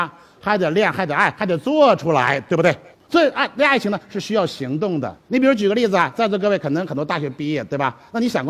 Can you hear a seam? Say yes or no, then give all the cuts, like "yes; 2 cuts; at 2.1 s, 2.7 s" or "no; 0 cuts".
yes; 2 cuts; at 2.9 s, 5.2 s